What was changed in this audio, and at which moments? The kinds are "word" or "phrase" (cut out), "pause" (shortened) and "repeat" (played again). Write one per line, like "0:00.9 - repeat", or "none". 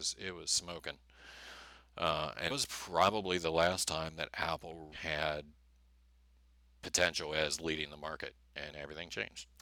0:02.5 - word
0:04.9 - word
0:08.7 - word